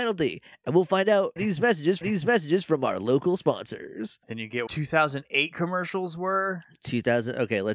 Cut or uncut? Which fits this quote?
cut